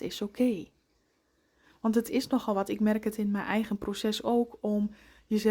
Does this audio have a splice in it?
no; 0 cuts

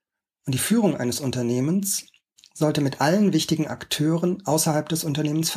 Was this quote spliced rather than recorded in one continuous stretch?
no; 0 cuts

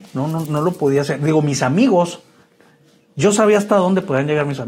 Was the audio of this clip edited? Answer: no; 0 cuts

